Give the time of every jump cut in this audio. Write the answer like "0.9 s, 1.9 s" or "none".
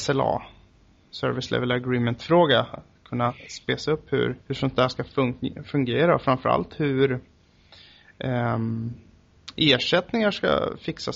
4.4 s